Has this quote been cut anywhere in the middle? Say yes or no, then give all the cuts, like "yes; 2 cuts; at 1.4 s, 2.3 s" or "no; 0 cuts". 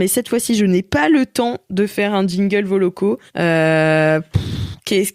yes; 1 cut; at 3.3 s